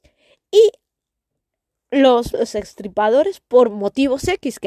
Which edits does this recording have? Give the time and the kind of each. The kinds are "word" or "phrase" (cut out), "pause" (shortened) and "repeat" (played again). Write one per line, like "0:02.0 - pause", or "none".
0:02.3 - word